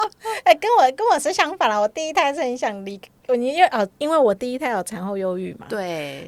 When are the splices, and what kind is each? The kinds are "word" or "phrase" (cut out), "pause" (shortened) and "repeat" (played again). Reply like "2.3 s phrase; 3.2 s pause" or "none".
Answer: 4.0 s pause